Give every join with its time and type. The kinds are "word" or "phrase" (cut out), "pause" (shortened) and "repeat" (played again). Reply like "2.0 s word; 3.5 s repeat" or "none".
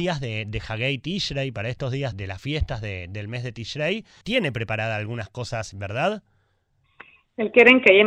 2.1 s word; 4.2 s word; 5.7 s word